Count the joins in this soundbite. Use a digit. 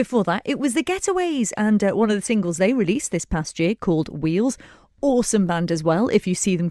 0